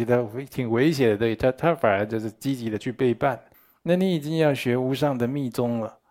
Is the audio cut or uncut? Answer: cut